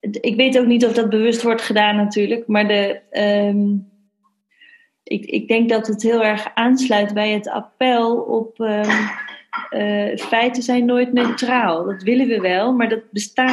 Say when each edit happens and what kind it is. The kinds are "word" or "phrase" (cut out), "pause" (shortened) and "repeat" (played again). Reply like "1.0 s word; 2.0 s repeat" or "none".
none